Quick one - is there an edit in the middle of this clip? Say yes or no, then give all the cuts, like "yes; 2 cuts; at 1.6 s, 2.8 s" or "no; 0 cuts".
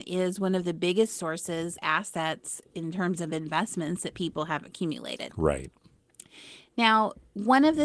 yes; 1 cut; at 1.8 s